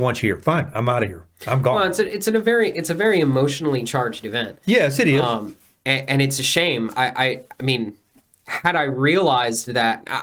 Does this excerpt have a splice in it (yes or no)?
no